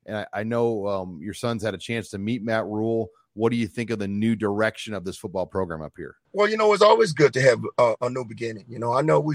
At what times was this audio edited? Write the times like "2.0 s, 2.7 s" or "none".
6.2 s